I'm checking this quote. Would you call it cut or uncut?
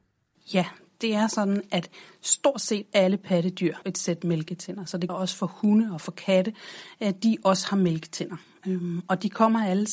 cut